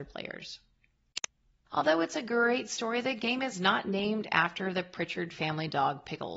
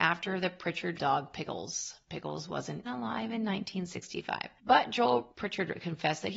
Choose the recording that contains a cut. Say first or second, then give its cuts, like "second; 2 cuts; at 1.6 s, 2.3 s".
second; 2 cuts; at 1.0 s, 2.8 s